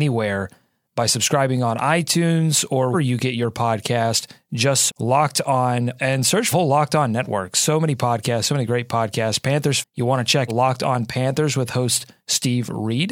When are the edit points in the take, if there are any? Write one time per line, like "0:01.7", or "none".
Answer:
0:02.9
0:04.9
0:06.0
0:06.5
0:09.8
0:10.5